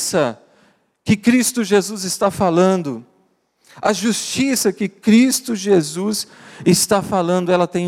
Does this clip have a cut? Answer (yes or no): no